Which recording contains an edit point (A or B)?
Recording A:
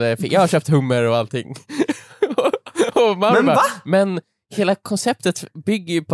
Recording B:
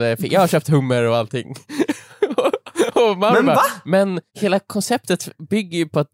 B